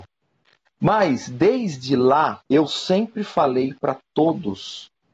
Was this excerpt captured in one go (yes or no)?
no